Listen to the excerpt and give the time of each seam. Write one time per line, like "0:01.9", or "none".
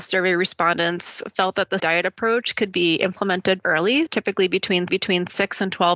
0:01.8
0:03.6
0:04.1
0:04.9

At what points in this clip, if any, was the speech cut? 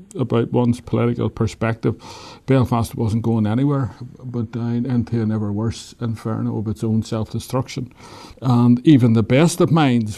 none

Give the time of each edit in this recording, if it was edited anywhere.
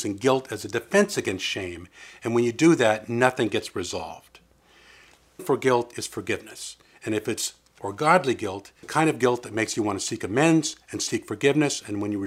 0:05.4
0:07.8
0:08.8

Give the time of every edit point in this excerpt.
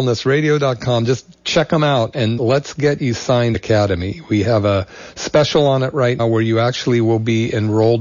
0:02.4
0:03.5
0:06.2

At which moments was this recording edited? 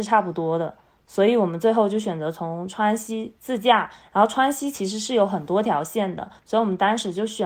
0:06.4

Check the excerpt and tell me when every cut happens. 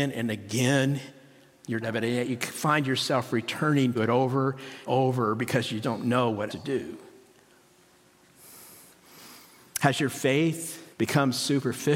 0:01.8
0:03.9
0:04.9
0:05.8
0:06.5
0:10.9

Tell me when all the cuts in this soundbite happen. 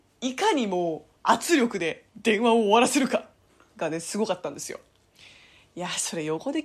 0:01.2

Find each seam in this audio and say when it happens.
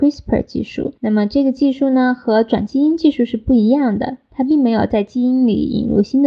0:01.0

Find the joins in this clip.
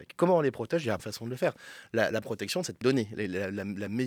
0:01.0
0:02.2
0:02.8

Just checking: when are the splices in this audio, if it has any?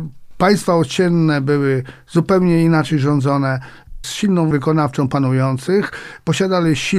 0:04.0
0:04.5

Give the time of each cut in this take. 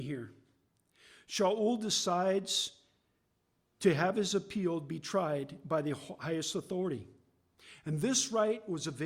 none

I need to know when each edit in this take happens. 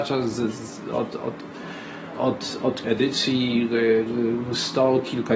0:02.2
0:02.8

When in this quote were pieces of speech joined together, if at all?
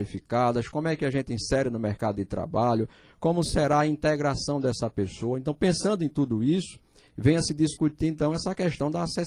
none

